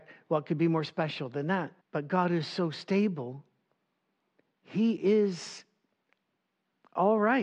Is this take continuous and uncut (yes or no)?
no